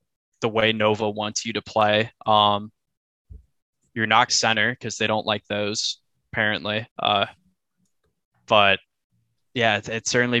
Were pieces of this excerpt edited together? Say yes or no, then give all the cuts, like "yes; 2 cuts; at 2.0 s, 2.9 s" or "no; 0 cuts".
yes; 3 cuts; at 2.1 s, 4.3 s, 6.9 s